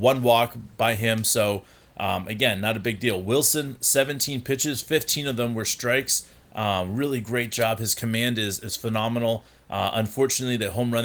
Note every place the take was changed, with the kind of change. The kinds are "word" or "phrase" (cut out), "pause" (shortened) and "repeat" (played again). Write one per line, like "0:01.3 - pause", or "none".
none